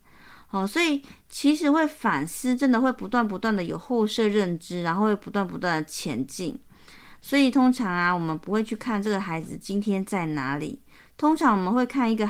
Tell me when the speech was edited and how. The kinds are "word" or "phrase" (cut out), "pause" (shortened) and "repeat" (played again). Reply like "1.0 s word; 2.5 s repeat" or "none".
none

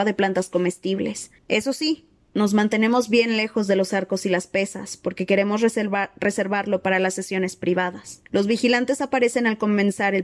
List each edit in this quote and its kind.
1.4 s pause; 8.3 s pause

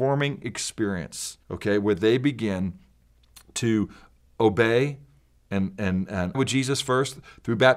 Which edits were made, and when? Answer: 1.4 s pause; 4.3 s word; 6.3 s word

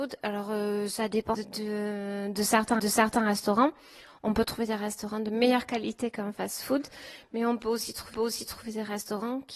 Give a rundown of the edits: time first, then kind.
1.3 s word; 2.8 s repeat; 8.1 s repeat

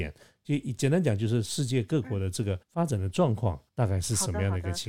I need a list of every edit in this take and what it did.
2.6 s pause; 3.7 s pause

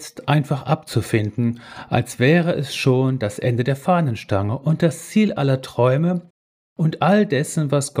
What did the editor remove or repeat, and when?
none

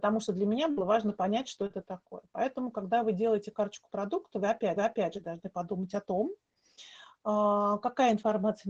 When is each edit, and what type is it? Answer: 4.8 s repeat

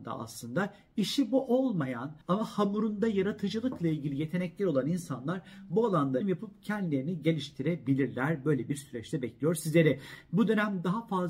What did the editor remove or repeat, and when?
2.2 s pause; 6.2 s word

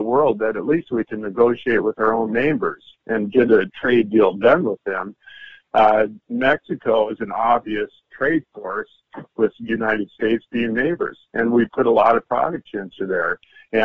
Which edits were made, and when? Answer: none

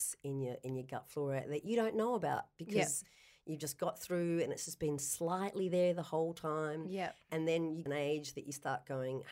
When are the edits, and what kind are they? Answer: 7.9 s phrase

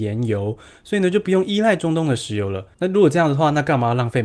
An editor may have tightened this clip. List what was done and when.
2.7 s pause

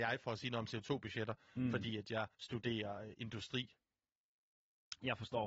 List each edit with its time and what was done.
2.3 s pause

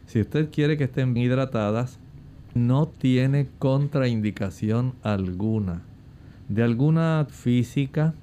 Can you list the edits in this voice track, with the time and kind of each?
1.2 s word; 2.6 s word; 7.3 s word

